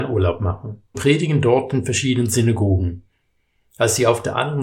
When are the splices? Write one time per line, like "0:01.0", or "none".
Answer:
0:00.9